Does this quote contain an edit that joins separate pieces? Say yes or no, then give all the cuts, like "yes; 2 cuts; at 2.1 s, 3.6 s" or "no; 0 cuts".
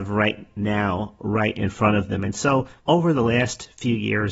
yes; 1 cut; at 2.8 s